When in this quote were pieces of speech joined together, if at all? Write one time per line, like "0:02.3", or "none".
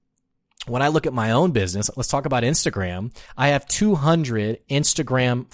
0:03.3